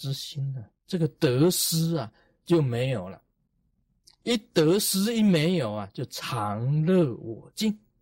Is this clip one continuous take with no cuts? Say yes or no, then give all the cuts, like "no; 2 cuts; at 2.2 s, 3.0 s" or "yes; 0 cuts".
yes; 0 cuts